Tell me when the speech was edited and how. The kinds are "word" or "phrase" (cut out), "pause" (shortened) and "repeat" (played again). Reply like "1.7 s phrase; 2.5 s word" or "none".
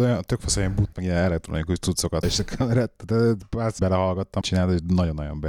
0.9 s word; 2.2 s word; 3.8 s word; 4.4 s word